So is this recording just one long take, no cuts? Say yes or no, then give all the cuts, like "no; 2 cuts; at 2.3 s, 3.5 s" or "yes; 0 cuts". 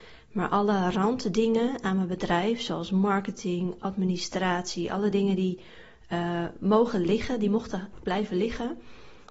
yes; 0 cuts